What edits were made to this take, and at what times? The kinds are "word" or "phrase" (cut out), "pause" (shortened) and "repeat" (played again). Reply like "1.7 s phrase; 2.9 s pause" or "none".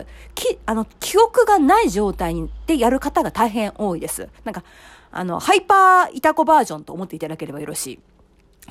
4.3 s pause